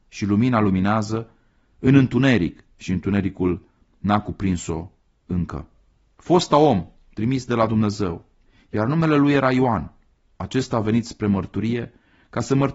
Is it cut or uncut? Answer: uncut